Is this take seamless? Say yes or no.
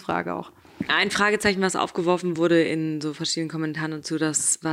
yes